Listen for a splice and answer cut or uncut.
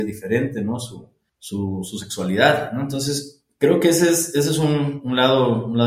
cut